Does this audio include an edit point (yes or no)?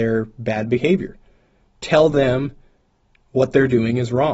no